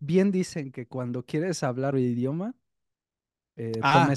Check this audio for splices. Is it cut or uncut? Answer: cut